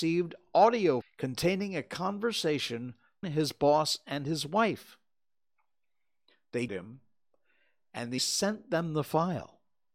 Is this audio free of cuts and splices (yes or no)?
no